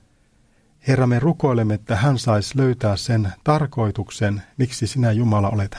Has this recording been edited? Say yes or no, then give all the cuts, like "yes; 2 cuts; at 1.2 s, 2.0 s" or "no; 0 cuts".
no; 0 cuts